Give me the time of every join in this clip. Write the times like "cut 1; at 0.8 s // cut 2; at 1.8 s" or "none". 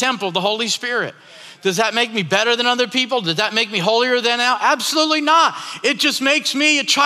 none